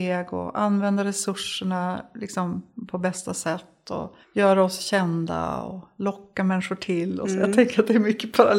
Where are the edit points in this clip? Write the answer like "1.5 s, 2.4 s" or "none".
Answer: 4.2 s